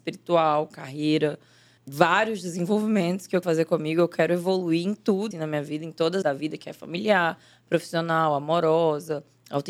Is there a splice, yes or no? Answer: yes